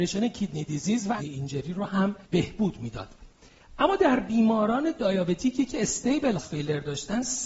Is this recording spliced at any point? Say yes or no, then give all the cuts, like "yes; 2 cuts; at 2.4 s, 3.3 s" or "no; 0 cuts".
yes; 3 cuts; at 1.2 s, 2.2 s, 6.4 s